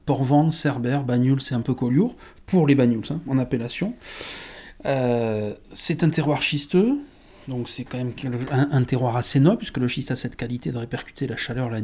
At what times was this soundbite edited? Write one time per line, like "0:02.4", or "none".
none